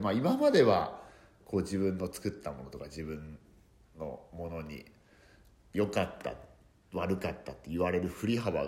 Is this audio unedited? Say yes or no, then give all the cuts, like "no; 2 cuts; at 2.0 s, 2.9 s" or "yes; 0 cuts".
yes; 0 cuts